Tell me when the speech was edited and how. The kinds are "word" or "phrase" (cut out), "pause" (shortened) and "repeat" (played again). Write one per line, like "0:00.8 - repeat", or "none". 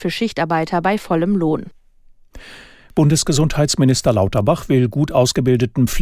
none